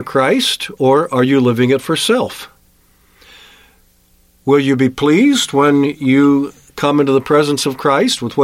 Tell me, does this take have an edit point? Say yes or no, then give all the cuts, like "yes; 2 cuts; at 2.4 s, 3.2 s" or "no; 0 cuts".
no; 0 cuts